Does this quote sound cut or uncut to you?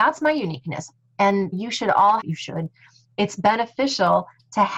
cut